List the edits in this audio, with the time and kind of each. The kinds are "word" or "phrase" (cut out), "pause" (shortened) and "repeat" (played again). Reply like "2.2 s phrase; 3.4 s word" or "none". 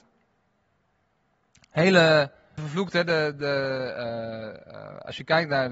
2.6 s phrase